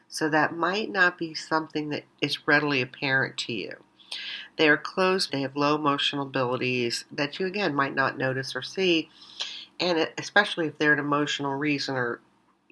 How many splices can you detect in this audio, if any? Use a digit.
2